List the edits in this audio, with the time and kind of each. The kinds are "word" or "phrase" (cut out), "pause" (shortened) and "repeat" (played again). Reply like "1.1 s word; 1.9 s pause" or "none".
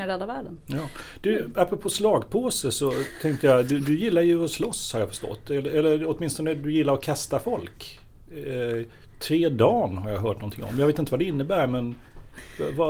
none